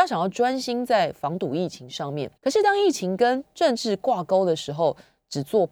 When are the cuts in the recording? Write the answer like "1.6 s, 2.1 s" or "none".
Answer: 2.4 s